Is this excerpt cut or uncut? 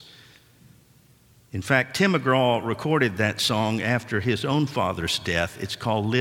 uncut